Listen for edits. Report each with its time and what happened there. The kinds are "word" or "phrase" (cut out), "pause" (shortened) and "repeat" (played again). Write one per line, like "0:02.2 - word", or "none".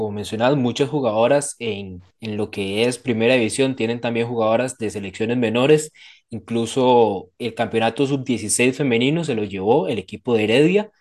none